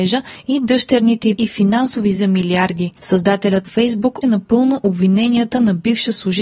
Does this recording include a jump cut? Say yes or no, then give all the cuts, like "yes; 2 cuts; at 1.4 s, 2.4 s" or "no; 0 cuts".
yes; 4 cuts; at 1.4 s, 2.1 s, 3.6 s, 4.2 s